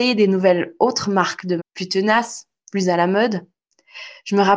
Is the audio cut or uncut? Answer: cut